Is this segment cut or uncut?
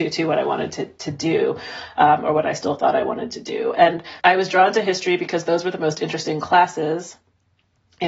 cut